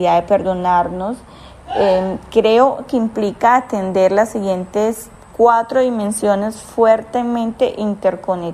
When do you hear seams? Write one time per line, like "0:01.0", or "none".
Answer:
none